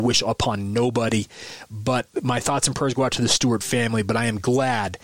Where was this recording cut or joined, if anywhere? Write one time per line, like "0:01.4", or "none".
none